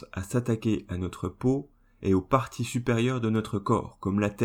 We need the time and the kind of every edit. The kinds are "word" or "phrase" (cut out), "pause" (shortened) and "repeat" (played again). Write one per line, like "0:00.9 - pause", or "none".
none